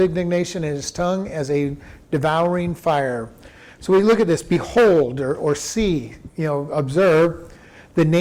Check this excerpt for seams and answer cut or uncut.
uncut